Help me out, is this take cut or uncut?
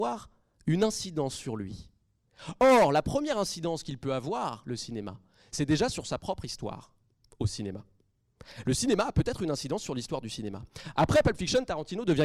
uncut